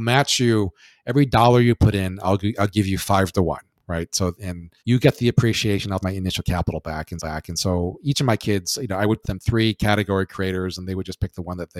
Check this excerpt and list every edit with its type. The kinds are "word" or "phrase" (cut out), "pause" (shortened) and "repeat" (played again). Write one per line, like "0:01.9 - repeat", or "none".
0:04.3 - word
0:04.8 - pause
0:06.0 - word
0:07.2 - repeat
0:09.2 - word